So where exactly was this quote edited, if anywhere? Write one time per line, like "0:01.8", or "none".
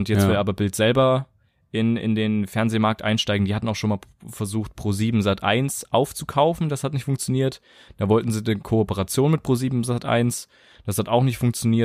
none